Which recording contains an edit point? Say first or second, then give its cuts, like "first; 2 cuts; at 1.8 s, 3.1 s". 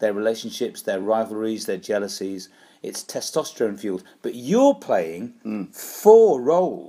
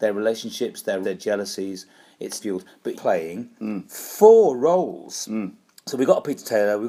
second; 3 cuts; at 1.0 s, 2.4 s, 2.9 s